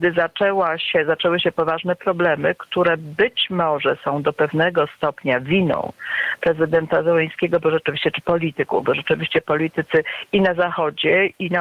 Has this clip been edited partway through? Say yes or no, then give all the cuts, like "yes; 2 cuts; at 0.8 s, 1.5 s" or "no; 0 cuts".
no; 0 cuts